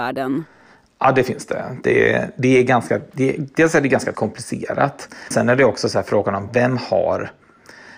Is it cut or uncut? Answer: cut